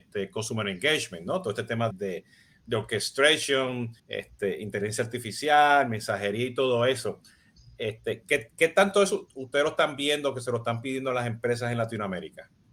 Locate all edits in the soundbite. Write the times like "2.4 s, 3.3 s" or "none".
1.9 s, 4.0 s